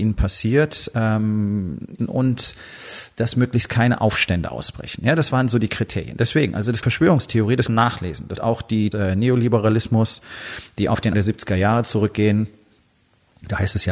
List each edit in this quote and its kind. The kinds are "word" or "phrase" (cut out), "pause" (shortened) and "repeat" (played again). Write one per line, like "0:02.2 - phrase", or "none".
0:02.0 - phrase
0:06.8 - word
0:07.7 - phrase
0:08.4 - word
0:08.9 - phrase
0:11.1 - word